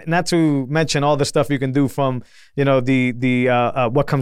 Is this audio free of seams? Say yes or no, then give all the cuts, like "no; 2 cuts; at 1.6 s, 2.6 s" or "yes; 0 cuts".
yes; 0 cuts